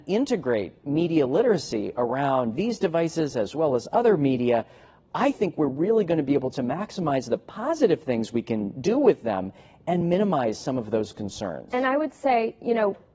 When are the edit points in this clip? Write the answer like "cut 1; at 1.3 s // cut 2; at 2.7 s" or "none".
none